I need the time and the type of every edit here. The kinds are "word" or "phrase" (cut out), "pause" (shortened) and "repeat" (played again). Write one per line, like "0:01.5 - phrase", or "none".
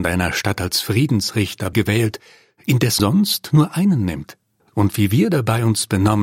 0:01.7 - word
0:03.0 - word
0:04.6 - pause